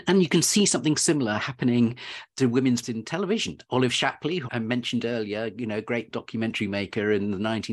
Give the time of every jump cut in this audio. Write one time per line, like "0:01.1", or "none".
0:02.3
0:02.8
0:04.5
0:06.1